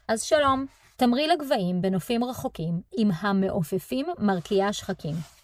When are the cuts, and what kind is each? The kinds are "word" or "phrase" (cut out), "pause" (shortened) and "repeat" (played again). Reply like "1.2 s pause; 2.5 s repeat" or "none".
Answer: none